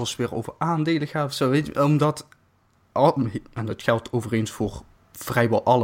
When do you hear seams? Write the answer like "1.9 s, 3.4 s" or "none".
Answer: none